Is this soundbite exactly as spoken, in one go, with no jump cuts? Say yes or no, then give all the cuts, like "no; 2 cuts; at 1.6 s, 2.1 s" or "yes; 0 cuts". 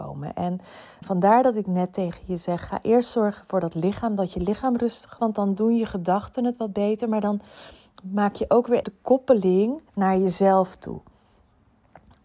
no; 4 cuts; at 1.0 s, 5.2 s, 8.8 s, 9.9 s